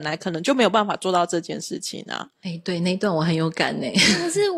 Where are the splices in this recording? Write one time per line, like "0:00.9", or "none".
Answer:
none